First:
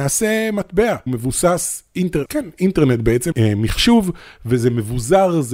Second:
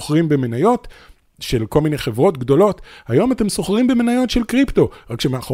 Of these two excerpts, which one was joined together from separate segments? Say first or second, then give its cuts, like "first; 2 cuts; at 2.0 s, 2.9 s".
first; 3 cuts; at 1.1 s, 2.3 s, 3.3 s